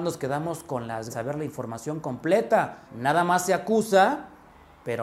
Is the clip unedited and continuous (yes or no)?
no